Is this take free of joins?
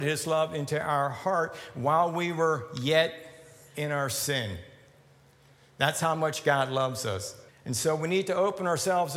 no; 1 cut; at 7.5 s

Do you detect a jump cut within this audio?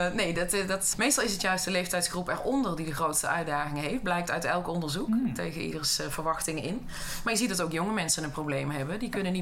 yes; 1 cut; at 0.9 s

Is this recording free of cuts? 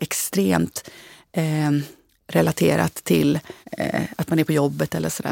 no; 1 cut; at 3.6 s

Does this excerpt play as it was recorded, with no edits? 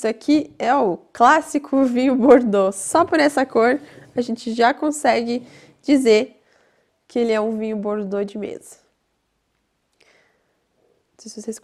yes; 0 cuts

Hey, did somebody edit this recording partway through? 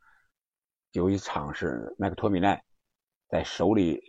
no; 0 cuts

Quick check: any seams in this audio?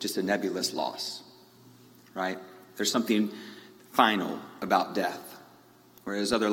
no; 0 cuts

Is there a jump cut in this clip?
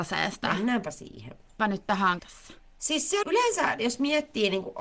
yes; 3 cuts; at 1.6 s, 2.2 s, 3.2 s

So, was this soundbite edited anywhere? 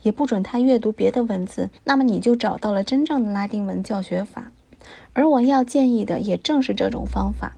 yes; 1 cut; at 1.7 s

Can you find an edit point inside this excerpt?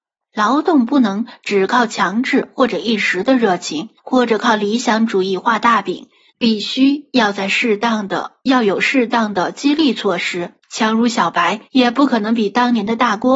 yes; 4 cuts; at 4.0 s, 6.3 s, 10.6 s, 11.7 s

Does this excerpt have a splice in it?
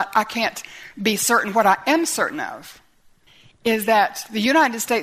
no; 0 cuts

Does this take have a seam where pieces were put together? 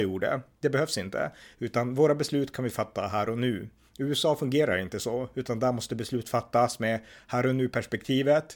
no; 0 cuts

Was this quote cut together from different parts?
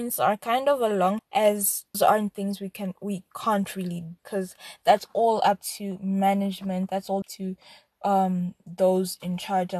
yes; 4 cuts; at 1.2 s, 1.9 s, 4.2 s, 7.2 s

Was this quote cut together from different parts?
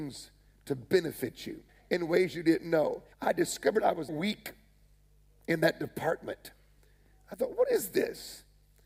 yes; 3 cuts; at 1.7 s, 3.1 s, 4.1 s

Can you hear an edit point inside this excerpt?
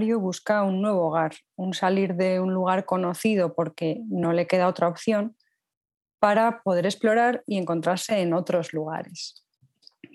no; 0 cuts

